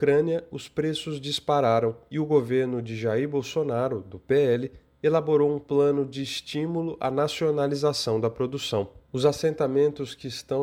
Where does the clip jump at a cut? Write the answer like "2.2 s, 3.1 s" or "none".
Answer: none